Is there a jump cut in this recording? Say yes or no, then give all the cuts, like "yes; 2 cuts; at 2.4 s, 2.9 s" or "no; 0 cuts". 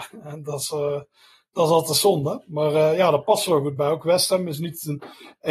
no; 0 cuts